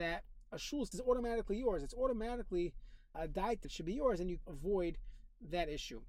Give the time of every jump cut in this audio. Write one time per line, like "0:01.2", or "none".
0:00.9
0:03.1
0:03.6
0:04.4